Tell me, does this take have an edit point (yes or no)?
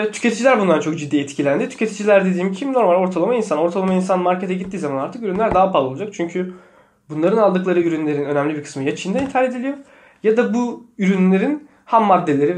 no